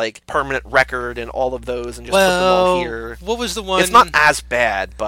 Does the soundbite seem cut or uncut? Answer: uncut